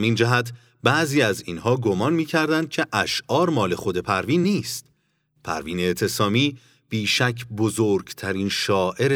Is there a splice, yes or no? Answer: no